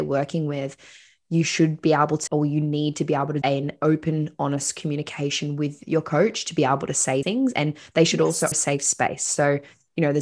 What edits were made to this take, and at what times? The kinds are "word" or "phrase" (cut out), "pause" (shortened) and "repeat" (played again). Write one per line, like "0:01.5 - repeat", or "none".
0:02.3 - word
0:03.4 - word
0:07.2 - word
0:08.5 - word